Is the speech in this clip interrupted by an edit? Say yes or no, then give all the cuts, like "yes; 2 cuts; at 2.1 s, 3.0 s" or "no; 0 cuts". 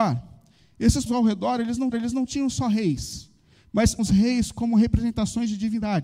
yes; 3 cuts; at 1.1 s, 1.9 s, 4.0 s